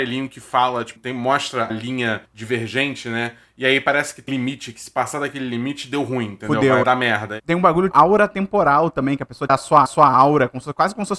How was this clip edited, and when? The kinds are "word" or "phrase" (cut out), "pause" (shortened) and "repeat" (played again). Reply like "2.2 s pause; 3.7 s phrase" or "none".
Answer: 1.0 s word; 1.7 s word; 2.3 s pause; 4.3 s word; 6.8 s phrase; 7.9 s word; 9.5 s word; 9.9 s repeat